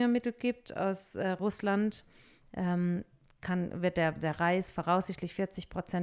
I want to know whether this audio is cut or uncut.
uncut